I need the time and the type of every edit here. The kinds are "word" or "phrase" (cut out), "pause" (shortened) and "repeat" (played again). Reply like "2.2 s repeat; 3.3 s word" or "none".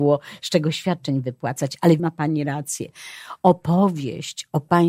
2.0 s word